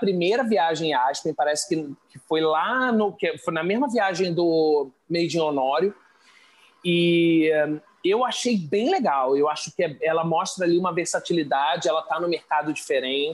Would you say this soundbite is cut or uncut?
uncut